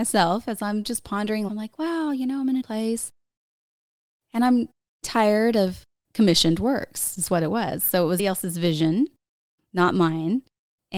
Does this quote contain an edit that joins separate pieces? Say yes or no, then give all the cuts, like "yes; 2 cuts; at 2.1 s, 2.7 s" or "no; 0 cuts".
yes; 5 cuts; at 1.5 s, 2.6 s, 5.0 s, 6.0 s, 8.2 s